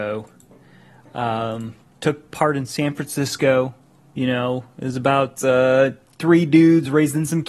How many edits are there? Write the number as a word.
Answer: zero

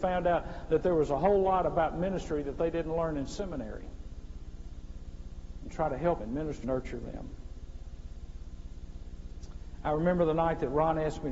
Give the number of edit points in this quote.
two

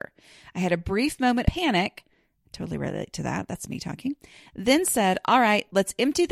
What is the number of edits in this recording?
one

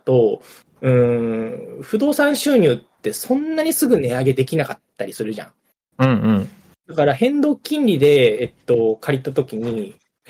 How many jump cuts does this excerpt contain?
zero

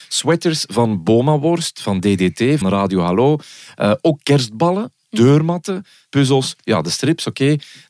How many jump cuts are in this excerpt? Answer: two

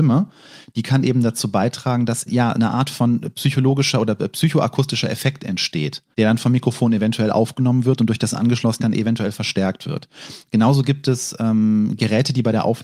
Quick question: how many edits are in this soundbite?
three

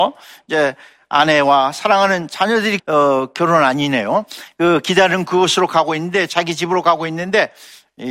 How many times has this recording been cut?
one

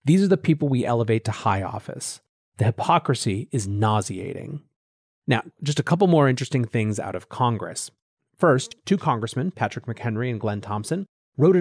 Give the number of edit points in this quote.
zero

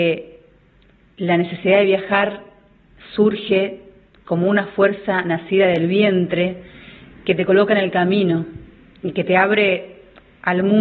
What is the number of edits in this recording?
zero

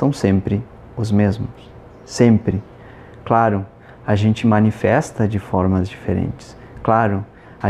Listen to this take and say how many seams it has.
zero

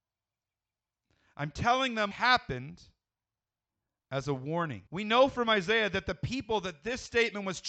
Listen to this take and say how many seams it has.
three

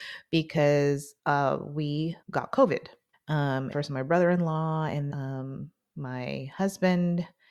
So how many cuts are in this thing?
five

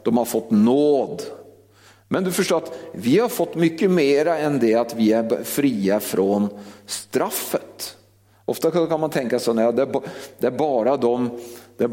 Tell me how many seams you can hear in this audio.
zero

